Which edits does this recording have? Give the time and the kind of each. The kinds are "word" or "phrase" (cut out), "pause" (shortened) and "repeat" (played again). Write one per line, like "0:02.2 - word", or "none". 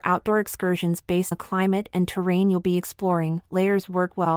0:01.3 - word